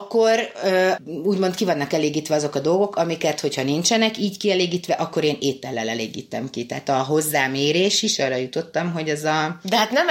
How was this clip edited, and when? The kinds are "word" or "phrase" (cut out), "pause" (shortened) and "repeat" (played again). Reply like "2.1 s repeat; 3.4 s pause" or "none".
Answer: 1.0 s word